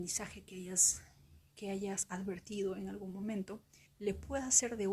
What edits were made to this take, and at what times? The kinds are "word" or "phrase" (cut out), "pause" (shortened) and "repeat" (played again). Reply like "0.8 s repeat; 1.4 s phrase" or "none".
1.5 s pause; 3.9 s pause